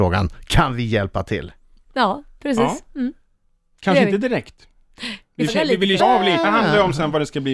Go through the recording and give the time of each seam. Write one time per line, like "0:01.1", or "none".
0:05.5
0:06.0
0:06.4